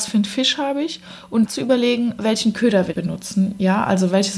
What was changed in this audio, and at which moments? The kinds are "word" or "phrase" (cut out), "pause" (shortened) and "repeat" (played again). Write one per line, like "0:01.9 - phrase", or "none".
0:01.5 - word
0:02.9 - word